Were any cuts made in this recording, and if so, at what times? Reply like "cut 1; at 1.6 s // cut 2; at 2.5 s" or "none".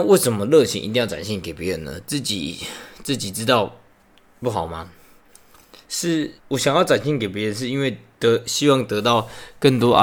cut 1; at 6.4 s